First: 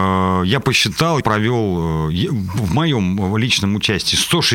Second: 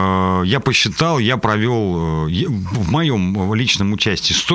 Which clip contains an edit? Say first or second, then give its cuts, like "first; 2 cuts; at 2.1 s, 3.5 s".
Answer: first; 1 cut; at 1.2 s